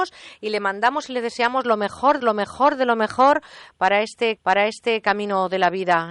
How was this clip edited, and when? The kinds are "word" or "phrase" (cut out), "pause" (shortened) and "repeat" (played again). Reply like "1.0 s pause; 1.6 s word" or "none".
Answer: 2.2 s repeat; 4.4 s repeat